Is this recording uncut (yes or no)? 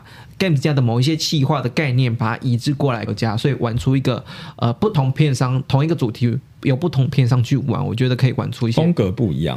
no